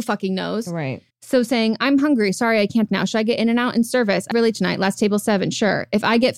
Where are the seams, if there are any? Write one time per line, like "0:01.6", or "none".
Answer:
0:01.1
0:02.9
0:04.3